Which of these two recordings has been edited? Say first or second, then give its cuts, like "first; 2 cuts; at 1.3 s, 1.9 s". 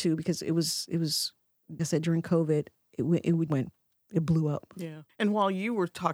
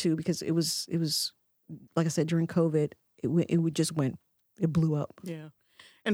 first; 3 cuts; at 1.8 s, 3.5 s, 5.1 s